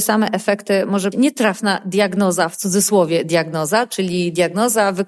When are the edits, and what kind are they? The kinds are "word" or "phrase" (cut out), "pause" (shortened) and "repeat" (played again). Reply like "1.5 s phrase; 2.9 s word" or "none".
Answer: 1.1 s word